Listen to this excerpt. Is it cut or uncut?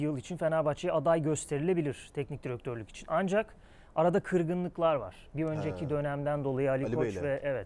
uncut